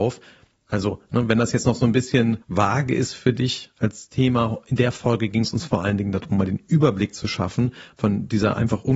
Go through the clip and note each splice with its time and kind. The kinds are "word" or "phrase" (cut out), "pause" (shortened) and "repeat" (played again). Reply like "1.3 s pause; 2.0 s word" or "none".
2.4 s pause